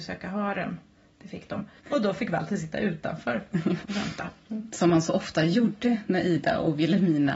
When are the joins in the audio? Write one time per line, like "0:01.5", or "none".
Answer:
0:01.8
0:03.8